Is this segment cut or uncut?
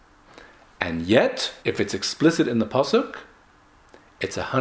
cut